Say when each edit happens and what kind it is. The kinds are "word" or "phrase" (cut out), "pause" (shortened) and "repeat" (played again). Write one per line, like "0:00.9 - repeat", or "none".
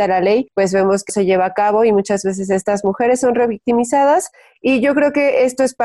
0:01.1 - word